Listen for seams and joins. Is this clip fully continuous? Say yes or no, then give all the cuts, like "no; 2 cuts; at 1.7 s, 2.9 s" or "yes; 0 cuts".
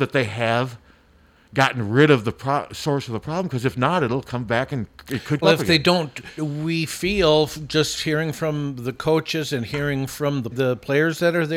no; 3 cuts; at 5.4 s, 6.4 s, 10.5 s